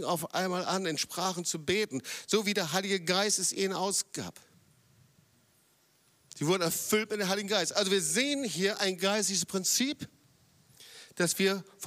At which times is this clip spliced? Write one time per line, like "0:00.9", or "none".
none